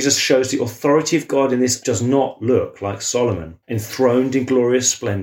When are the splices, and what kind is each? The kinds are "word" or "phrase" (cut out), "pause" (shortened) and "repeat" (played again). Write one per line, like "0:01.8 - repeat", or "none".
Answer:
0:01.8 - word
0:03.6 - pause